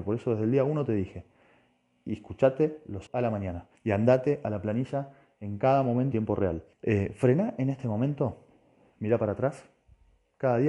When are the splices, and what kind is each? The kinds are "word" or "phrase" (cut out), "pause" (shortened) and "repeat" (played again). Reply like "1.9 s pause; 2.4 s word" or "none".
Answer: 3.1 s word; 3.8 s pause; 6.1 s word; 6.7 s pause